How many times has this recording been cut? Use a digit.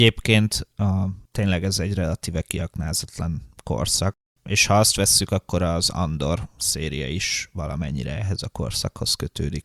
0